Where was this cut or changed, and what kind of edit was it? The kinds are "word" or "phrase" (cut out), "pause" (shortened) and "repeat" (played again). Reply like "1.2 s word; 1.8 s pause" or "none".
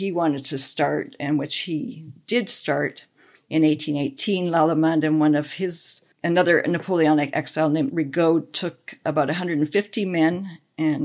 6.1 s pause; 7.9 s word